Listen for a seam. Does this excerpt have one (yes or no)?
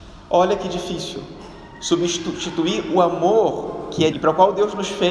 yes